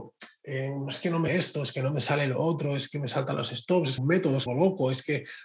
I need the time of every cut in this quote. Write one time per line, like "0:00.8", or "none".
0:01.3
0:04.0
0:04.5